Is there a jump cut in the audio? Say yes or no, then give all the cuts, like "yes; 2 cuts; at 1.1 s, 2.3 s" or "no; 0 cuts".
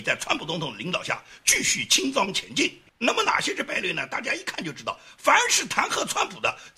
yes; 1 cut; at 2.9 s